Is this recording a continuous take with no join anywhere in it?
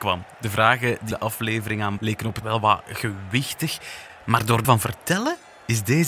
no; 4 cuts; at 1.1 s, 2.0 s, 2.4 s, 4.6 s

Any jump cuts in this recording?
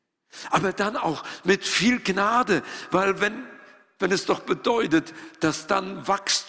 no; 0 cuts

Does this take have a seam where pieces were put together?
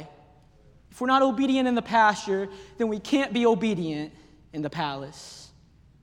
no; 0 cuts

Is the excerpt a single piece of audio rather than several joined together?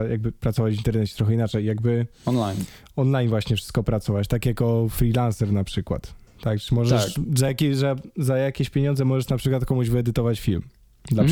yes; 0 cuts

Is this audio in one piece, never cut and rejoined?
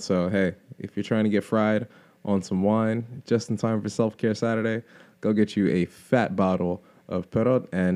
yes; 0 cuts

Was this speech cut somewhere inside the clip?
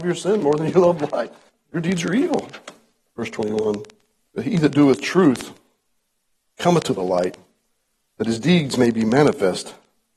no; 0 cuts

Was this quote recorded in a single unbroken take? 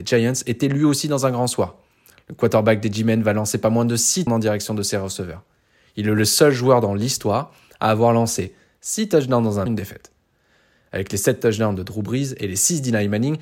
no; 2 cuts; at 4.3 s, 9.7 s

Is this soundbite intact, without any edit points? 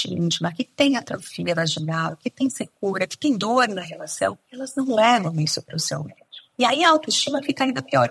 yes; 0 cuts

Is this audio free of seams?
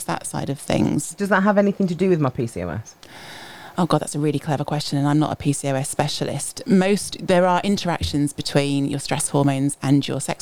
yes; 0 cuts

